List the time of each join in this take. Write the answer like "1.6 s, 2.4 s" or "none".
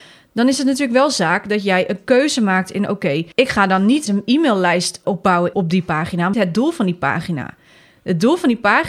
3.3 s, 4.1 s, 6.3 s